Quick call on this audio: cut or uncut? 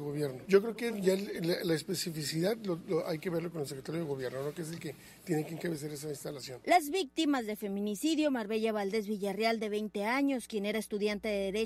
uncut